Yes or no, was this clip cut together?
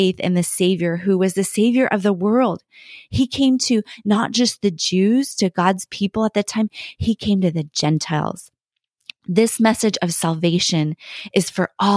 no